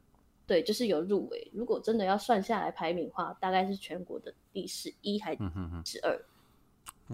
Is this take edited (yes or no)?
no